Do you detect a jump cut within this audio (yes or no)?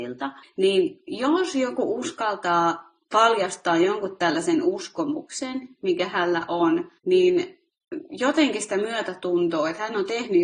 yes